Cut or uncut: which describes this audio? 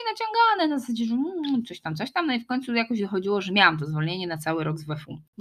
uncut